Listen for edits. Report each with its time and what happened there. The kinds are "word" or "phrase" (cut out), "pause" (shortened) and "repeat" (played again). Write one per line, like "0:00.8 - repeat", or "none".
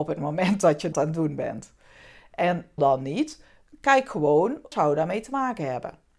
0:00.9 - word
0:02.8 - word
0:04.7 - word